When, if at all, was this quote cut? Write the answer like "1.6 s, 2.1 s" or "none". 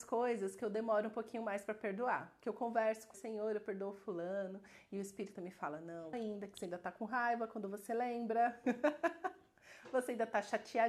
3.1 s, 5.4 s, 6.1 s